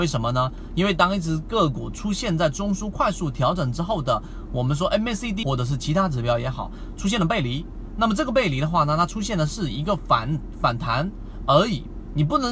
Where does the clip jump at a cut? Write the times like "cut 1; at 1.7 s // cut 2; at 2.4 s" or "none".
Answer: cut 1; at 5.4 s